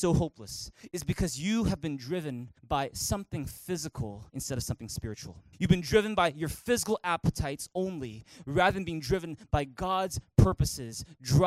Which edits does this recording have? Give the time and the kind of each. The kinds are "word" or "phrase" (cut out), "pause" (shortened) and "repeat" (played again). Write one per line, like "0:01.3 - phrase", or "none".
0:02.6 - pause
0:04.3 - pause
0:05.5 - pause